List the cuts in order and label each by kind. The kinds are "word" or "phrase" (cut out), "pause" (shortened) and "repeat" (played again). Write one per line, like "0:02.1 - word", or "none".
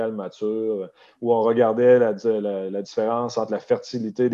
none